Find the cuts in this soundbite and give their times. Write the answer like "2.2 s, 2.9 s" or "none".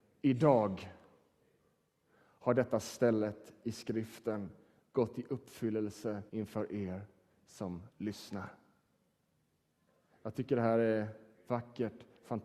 6.3 s, 7.9 s